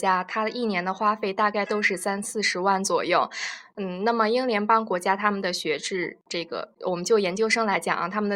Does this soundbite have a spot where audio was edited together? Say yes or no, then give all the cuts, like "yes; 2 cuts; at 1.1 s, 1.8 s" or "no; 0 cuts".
yes; 1 cut; at 6.8 s